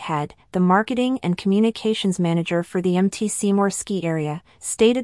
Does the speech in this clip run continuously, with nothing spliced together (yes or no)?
yes